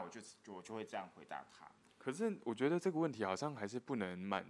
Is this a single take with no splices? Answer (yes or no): yes